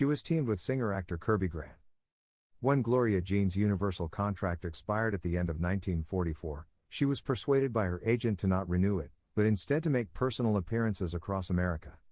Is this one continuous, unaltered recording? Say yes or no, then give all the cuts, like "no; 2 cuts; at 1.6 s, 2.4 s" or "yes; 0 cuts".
yes; 0 cuts